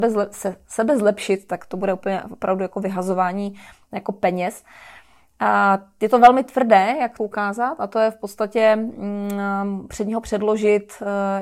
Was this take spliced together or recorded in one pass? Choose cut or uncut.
cut